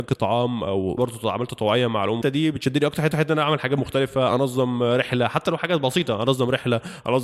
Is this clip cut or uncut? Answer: cut